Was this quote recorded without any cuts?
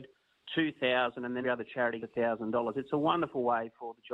no; 2 cuts; at 1.4 s, 2.0 s

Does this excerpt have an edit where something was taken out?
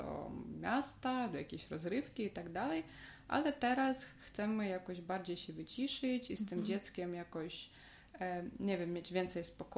no; 0 cuts

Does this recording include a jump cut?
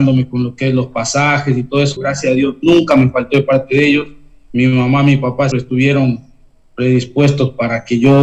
yes; 2 cuts; at 2.0 s, 5.5 s

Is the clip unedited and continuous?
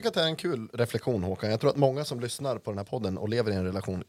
yes; 0 cuts

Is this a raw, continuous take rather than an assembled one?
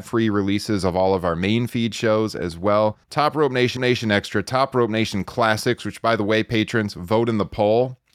no; 2 cuts; at 3.0 s, 3.8 s

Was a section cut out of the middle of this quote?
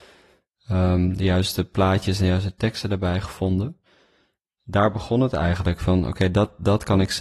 no; 0 cuts

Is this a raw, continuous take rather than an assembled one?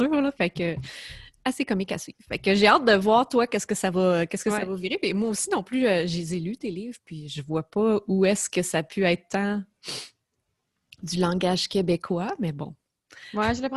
yes; 0 cuts

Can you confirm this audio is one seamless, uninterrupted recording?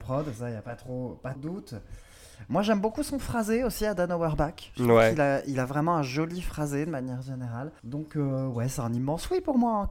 no; 1 cut; at 1.4 s

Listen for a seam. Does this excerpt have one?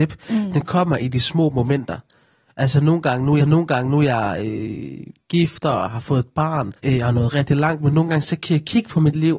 yes; 3 cuts; at 3.4 s, 6.8 s, 7.3 s

